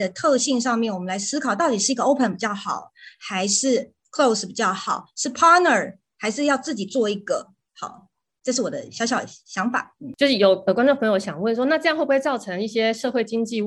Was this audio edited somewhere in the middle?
no; 0 cuts

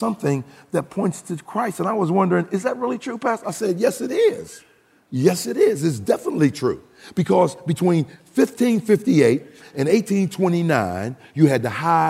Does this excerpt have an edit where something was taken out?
no; 0 cuts

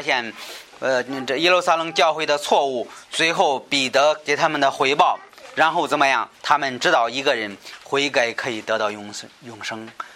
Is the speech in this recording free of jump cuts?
no; 1 cut; at 6.3 s

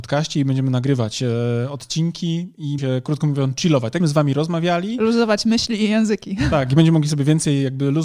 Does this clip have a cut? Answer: yes; 2 cuts; at 2.8 s, 4.0 s

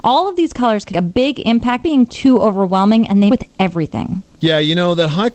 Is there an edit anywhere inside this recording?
yes; 3 cuts; at 0.9 s, 1.8 s, 3.3 s

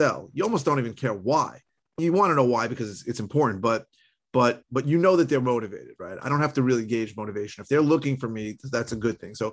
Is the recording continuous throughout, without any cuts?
no; 2 cuts; at 2.0 s, 4.6 s

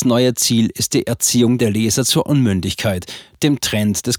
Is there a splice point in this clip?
no; 0 cuts

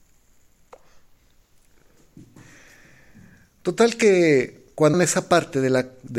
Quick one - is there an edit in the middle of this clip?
yes; 1 cut; at 4.9 s

